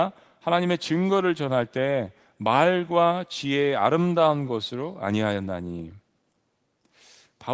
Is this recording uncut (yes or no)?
yes